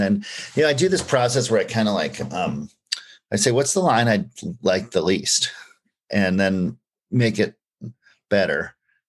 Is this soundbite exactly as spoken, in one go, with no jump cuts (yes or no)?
yes